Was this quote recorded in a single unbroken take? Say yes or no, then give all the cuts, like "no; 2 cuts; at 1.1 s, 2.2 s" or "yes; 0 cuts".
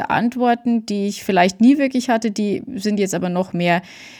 yes; 0 cuts